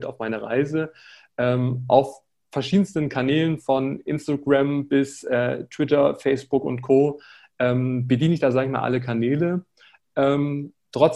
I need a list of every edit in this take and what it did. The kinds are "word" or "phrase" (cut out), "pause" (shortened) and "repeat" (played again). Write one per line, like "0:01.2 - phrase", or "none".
none

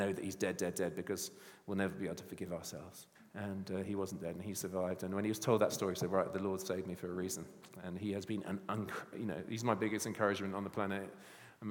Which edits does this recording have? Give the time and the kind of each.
0:03.2 - pause

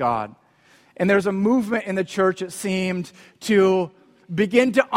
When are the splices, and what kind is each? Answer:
none

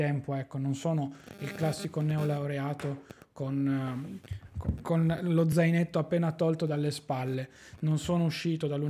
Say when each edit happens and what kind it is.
none

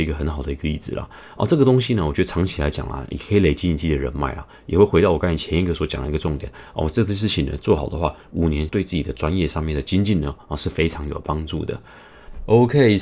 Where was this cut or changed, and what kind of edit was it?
0:08.7 - phrase

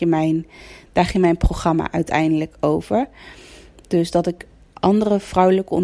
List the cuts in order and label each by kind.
none

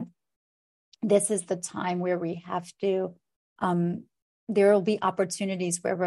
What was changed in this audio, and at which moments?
0:04.2 - pause

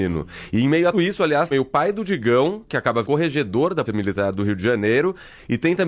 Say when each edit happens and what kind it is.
0:00.9 - word
0:01.5 - phrase
0:03.0 - word
0:03.9 - word

